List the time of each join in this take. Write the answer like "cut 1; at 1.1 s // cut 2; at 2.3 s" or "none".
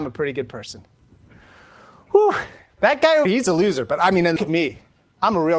cut 1; at 3.3 s // cut 2; at 4.4 s